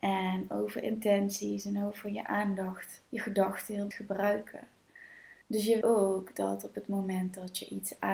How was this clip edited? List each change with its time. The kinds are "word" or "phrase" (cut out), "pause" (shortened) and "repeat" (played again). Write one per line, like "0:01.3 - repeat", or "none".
0:03.1 - pause
0:03.9 - word
0:05.4 - pause
0:05.8 - word